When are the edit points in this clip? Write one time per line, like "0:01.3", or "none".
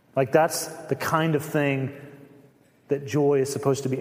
none